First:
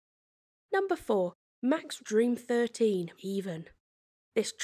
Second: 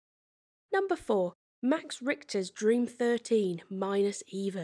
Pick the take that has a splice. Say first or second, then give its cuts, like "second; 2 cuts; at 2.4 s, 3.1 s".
first; 2 cuts; at 2.0 s, 3.2 s